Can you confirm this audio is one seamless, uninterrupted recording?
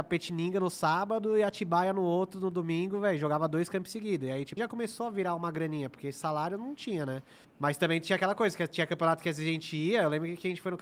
no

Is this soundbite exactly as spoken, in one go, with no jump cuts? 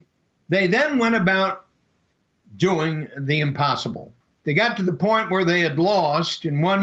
yes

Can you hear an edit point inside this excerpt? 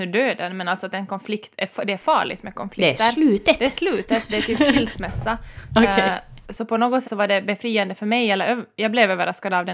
yes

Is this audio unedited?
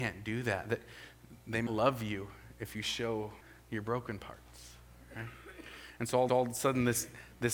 no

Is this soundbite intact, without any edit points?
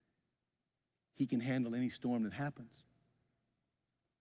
yes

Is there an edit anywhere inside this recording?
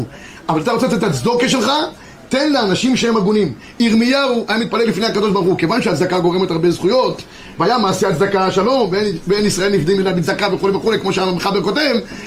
no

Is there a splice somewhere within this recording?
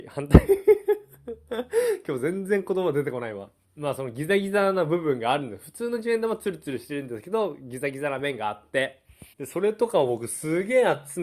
yes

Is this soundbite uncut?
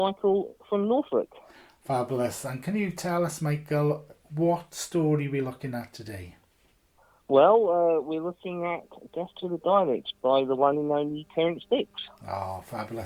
yes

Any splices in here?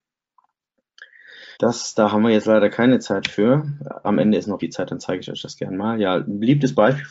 yes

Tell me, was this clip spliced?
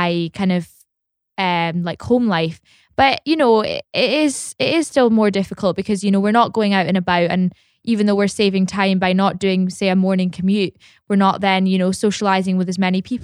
no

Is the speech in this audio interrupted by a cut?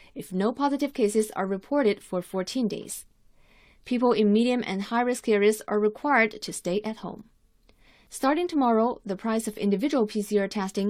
no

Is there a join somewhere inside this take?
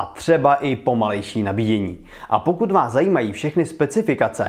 no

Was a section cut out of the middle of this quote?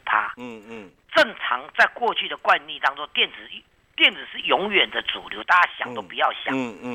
no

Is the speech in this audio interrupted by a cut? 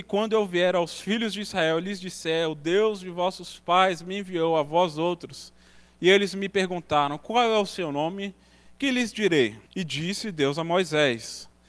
yes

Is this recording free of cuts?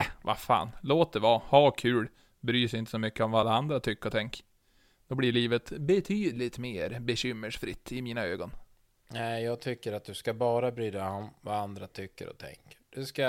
yes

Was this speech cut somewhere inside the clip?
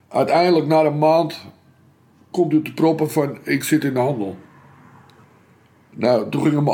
no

